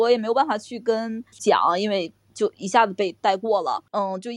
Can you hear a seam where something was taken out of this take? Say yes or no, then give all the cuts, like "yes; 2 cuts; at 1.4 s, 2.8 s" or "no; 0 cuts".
yes; 1 cut; at 1.3 s